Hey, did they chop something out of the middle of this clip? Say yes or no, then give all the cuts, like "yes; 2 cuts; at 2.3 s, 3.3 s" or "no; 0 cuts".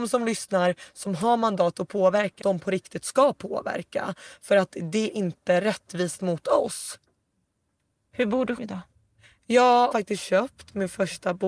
yes; 4 cuts; at 2.4 s, 5.1 s, 8.6 s, 9.9 s